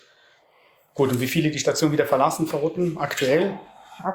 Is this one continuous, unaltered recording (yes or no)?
yes